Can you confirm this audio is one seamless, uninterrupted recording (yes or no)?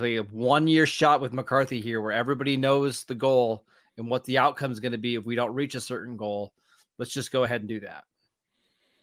yes